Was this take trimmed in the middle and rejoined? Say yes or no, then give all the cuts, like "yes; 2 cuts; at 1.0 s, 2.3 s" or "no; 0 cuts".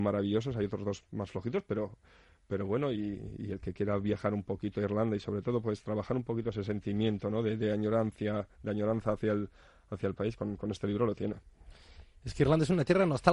no; 0 cuts